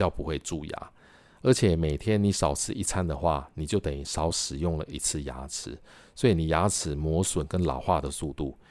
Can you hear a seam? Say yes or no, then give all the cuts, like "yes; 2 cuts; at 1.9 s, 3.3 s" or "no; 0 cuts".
no; 0 cuts